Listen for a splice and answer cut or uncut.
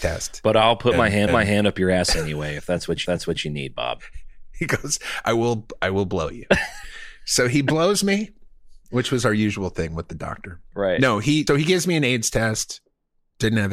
cut